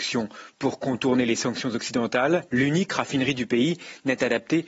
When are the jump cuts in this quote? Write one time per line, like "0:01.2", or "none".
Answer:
0:02.5